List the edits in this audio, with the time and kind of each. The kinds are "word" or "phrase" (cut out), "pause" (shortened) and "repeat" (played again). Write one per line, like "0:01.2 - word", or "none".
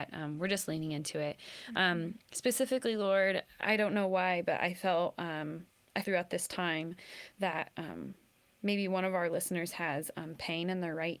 0:06.0 - word